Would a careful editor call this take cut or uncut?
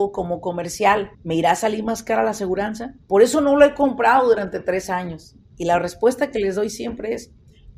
cut